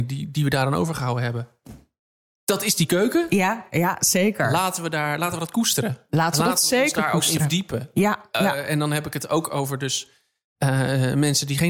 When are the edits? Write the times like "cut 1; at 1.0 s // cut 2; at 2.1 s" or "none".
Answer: none